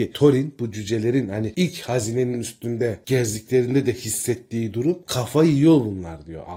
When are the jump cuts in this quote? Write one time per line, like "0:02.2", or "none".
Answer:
none